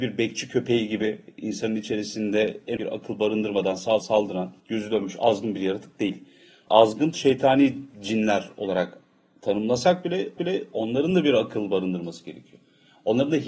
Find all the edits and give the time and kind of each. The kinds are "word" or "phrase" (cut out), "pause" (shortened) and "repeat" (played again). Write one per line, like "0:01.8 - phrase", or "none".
0:02.8 - word
0:04.0 - word
0:04.6 - pause
0:10.4 - repeat